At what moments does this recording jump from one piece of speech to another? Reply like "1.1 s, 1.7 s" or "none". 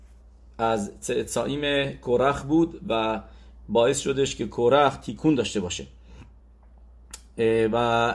none